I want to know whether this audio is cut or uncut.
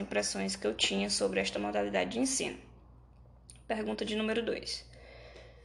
uncut